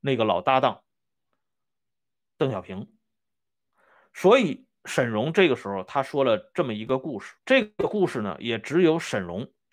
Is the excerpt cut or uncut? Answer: cut